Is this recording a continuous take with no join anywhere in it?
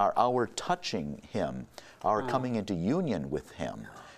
yes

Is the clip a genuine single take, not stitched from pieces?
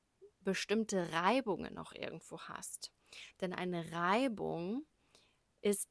yes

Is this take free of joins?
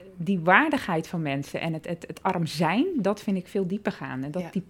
yes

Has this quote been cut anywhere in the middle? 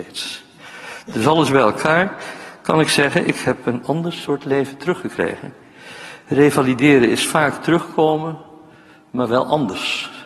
no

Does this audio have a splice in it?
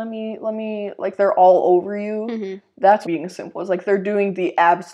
yes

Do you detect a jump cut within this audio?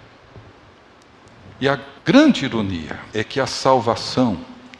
yes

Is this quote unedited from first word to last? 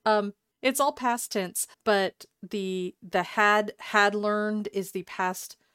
no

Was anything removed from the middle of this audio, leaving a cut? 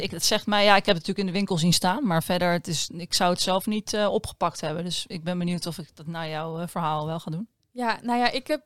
no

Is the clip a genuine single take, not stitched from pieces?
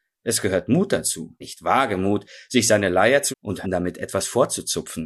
no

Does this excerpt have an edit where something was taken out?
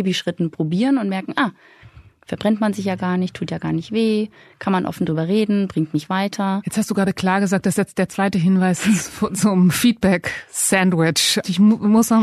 no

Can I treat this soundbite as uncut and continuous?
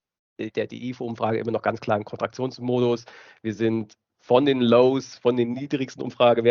yes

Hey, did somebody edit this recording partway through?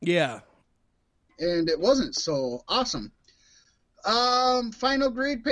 no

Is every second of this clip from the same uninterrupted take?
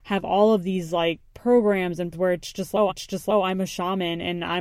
no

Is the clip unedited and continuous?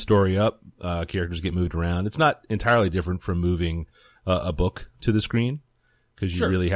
yes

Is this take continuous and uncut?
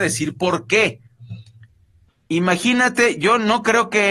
yes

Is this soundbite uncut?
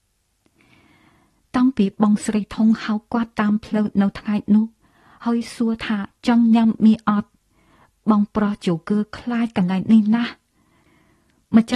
yes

